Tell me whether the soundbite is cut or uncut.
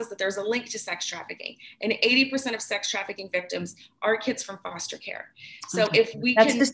uncut